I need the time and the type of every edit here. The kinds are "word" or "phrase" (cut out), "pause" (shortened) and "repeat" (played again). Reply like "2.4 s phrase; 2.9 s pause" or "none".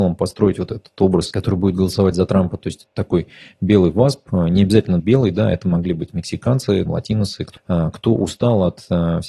1.3 s word; 5.0 s word; 6.9 s word; 7.6 s word